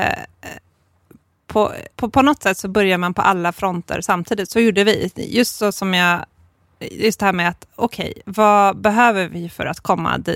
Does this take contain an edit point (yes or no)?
yes